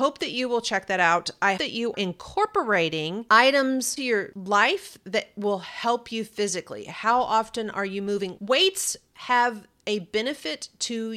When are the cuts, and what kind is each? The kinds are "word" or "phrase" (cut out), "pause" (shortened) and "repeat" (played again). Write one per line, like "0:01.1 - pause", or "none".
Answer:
0:01.6 - word
0:01.9 - word
0:04.0 - word